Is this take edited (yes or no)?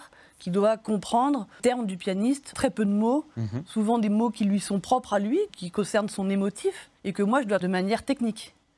yes